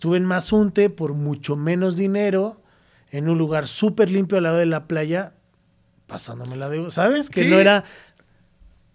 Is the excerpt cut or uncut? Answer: uncut